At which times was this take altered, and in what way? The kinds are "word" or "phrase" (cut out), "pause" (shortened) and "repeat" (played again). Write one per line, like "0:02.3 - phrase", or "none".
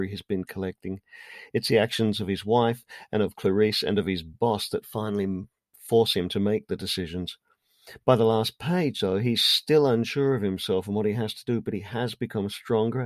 none